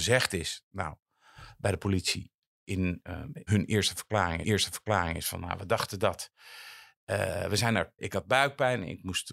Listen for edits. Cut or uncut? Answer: cut